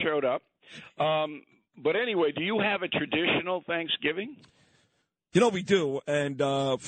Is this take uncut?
yes; 0 cuts

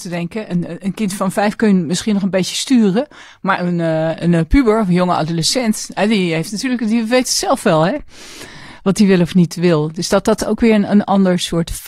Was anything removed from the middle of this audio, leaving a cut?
no; 0 cuts

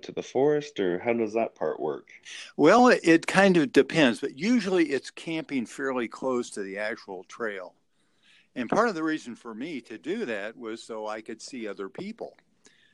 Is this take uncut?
yes; 0 cuts

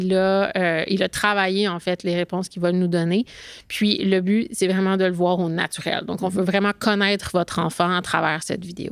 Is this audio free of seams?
yes; 0 cuts

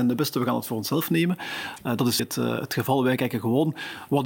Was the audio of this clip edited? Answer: yes; 1 cut; at 2.2 s

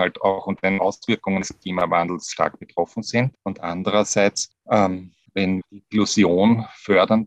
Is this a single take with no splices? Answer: no; 1 cut; at 5.6 s

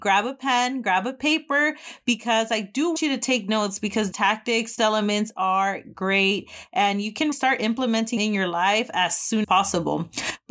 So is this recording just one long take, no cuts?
no; 6 cuts; at 3.0 s, 4.1 s, 4.8 s, 7.3 s, 8.2 s, 9.4 s

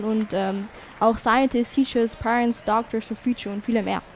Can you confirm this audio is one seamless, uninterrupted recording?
yes; 0 cuts

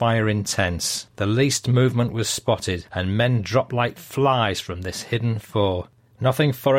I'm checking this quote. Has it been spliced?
yes; 1 cut; at 1.1 s

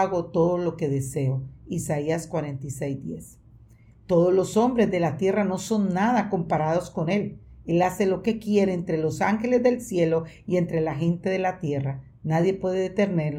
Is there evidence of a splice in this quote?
no; 0 cuts

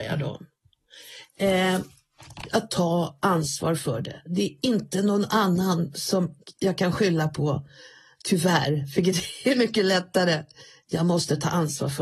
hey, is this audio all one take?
yes; 0 cuts

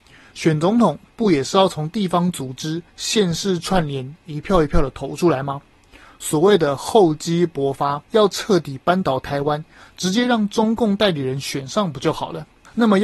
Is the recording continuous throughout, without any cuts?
no; 2 cuts; at 2.9 s, 8.0 s

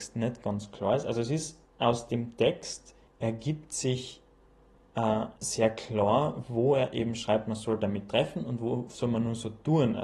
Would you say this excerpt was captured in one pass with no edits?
no; 3 cuts; at 1.7 s, 3.1 s, 5.4 s

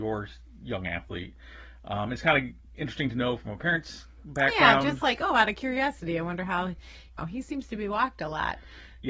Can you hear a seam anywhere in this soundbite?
yes; 1 cut; at 7.2 s

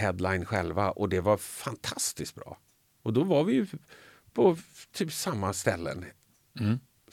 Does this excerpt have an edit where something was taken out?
no; 0 cuts

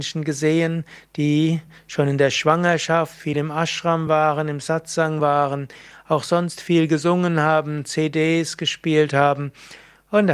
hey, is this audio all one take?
yes; 0 cuts

